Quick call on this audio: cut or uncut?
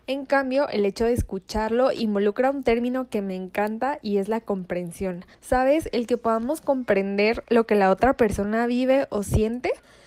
cut